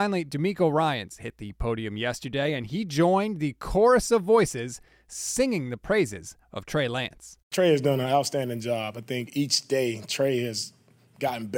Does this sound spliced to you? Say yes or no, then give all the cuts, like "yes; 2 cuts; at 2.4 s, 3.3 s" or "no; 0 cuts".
no; 0 cuts